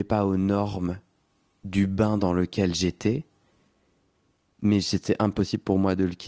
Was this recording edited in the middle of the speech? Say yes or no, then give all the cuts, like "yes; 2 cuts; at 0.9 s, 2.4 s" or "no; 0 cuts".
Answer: no; 0 cuts